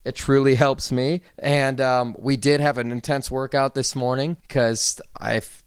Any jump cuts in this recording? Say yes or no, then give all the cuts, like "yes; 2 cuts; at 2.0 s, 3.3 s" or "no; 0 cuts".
yes; 2 cuts; at 1.3 s, 4.4 s